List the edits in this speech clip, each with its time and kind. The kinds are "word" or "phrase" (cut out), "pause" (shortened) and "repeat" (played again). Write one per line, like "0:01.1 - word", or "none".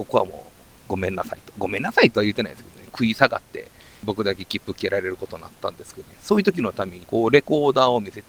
0:07.0 - word